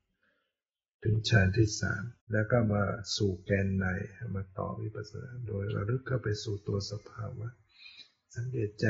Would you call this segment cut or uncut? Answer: cut